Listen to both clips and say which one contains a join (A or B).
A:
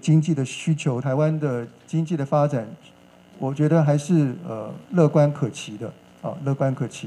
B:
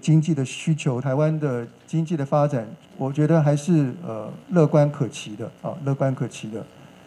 B